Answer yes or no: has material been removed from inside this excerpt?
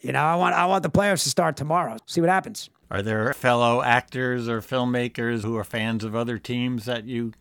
yes